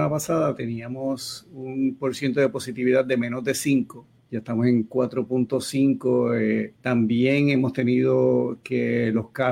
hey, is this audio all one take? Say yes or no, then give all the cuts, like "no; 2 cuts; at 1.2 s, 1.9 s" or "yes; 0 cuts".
no; 2 cuts; at 4.2 s, 6.8 s